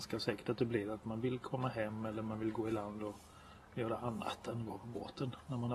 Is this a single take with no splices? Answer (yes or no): yes